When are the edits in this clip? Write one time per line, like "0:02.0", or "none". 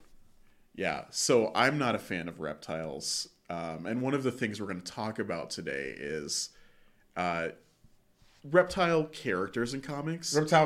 none